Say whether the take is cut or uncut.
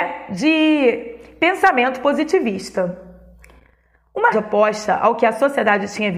cut